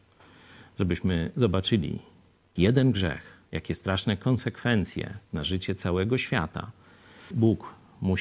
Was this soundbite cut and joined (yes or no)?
yes